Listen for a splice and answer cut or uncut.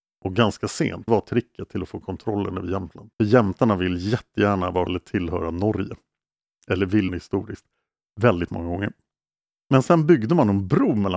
cut